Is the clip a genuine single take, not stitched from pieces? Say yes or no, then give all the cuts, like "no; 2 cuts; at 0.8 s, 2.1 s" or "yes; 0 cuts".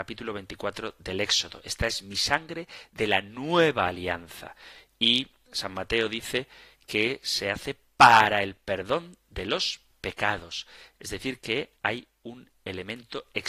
no; 1 cut; at 11.8 s